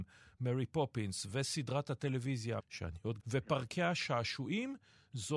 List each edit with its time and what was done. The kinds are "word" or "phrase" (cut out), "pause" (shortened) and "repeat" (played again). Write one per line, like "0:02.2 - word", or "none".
0:02.6 - word
0:03.2 - phrase